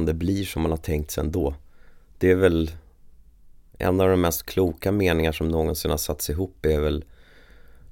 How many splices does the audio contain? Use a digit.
0